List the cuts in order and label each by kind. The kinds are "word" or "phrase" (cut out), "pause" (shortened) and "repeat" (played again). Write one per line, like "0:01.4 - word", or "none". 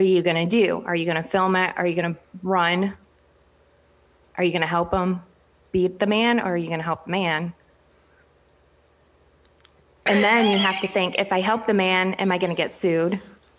none